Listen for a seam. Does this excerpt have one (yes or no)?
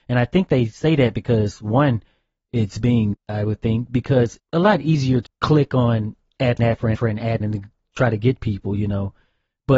yes